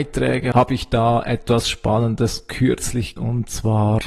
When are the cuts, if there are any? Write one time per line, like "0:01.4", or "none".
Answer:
0:03.2